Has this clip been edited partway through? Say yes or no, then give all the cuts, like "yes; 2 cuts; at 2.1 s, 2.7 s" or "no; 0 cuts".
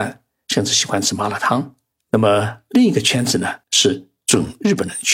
yes; 2 cuts; at 1.9 s, 3.6 s